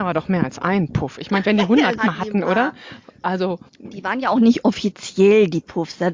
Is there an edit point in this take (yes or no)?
yes